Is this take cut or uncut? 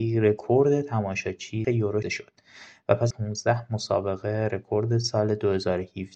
cut